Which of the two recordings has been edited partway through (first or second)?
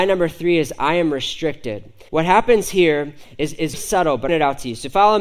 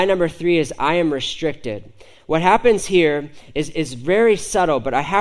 first